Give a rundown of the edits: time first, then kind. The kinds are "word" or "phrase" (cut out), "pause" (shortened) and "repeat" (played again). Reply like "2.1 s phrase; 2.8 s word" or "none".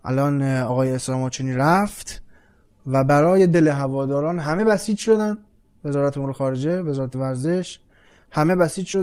none